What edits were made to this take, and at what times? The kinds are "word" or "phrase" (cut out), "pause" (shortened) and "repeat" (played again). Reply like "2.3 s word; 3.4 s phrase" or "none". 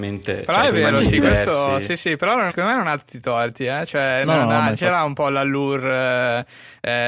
2.5 s word